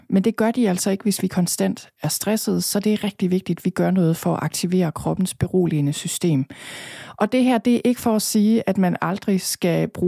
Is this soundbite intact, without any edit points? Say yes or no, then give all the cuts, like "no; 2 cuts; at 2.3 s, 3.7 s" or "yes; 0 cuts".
yes; 0 cuts